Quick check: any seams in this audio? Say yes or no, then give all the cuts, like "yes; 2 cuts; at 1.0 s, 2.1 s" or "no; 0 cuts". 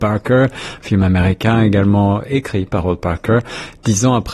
no; 0 cuts